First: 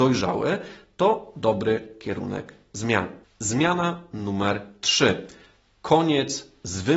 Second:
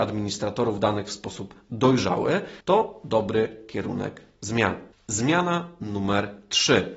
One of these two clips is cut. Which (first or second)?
second